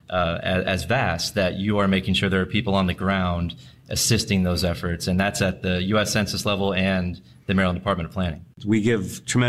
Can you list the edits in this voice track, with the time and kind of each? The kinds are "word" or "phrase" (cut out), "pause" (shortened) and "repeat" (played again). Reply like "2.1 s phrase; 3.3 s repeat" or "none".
none